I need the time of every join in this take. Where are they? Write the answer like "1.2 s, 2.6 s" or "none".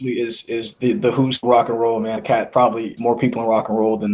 1.4 s, 2.2 s, 3.0 s